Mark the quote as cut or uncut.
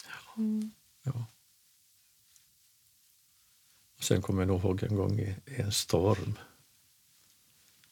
uncut